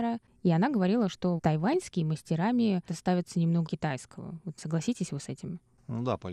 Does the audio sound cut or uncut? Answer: cut